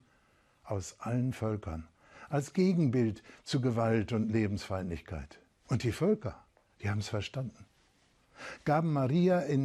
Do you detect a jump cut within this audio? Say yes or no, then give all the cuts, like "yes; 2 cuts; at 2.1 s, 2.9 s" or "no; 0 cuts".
no; 0 cuts